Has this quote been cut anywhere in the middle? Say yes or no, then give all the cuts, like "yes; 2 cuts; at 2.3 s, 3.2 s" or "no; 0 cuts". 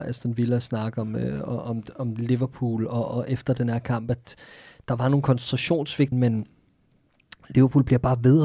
yes; 1 cut; at 6.1 s